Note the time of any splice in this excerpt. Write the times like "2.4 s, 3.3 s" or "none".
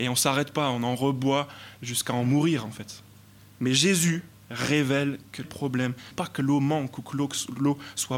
3.3 s, 4.3 s, 5.4 s, 6.1 s